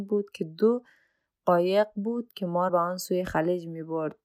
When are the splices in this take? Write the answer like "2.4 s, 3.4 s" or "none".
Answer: 2.7 s